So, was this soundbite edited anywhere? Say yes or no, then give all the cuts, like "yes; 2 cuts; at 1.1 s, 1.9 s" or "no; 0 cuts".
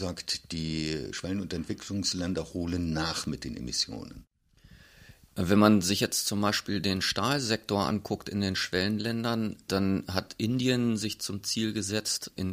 no; 0 cuts